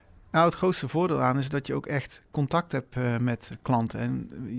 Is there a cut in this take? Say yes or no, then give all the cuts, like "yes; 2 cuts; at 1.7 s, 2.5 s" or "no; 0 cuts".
no; 0 cuts